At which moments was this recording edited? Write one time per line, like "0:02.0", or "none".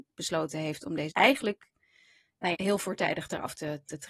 0:01.1
0:02.5